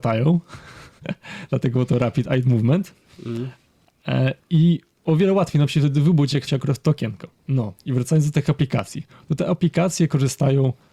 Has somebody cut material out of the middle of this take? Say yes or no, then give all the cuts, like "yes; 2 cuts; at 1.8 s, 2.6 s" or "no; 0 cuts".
yes; 2 cuts; at 6.5 s, 7.4 s